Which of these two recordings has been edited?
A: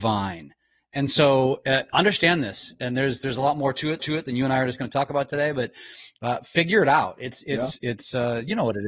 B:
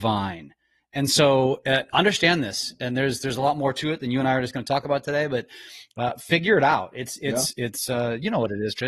A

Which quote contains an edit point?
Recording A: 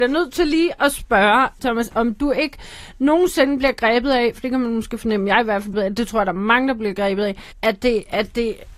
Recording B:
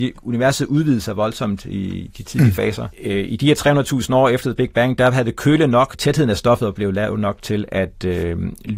A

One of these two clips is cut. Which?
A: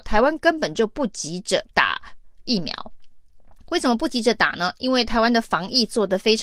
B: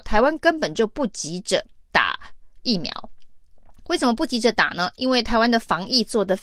A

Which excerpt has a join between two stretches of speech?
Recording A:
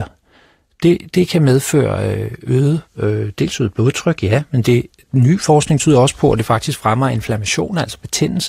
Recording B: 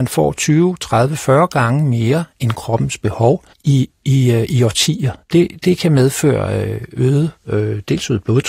B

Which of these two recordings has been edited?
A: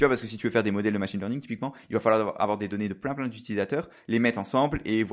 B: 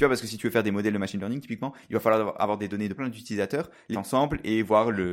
B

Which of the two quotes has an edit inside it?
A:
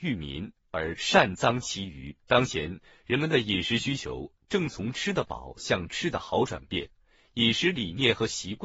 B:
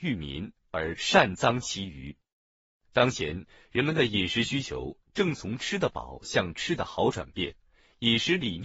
A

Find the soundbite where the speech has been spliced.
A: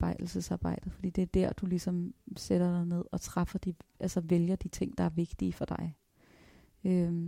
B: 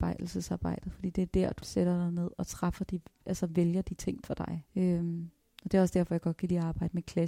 B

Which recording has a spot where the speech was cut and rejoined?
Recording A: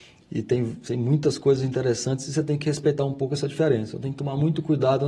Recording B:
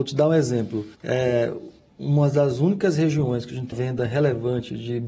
B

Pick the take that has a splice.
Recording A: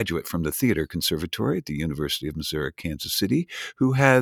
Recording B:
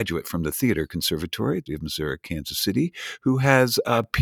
B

